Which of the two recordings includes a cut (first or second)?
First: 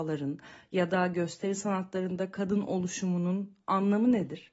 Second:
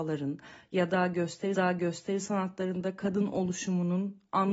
second